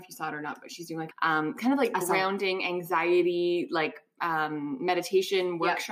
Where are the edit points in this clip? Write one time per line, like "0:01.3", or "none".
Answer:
0:01.1